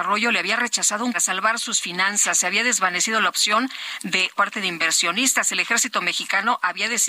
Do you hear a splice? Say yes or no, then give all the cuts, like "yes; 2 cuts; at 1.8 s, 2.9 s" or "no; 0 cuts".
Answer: yes; 2 cuts; at 1.1 s, 4.3 s